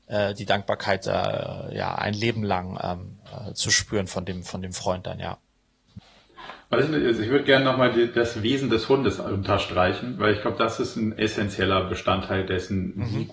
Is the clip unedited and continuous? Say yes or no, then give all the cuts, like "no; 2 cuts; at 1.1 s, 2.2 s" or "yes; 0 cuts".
yes; 0 cuts